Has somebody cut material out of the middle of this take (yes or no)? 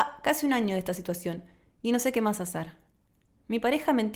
no